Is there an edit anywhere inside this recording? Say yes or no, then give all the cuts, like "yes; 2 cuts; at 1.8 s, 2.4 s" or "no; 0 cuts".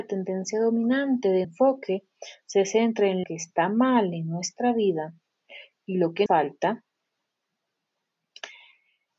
yes; 3 cuts; at 1.4 s, 3.2 s, 6.3 s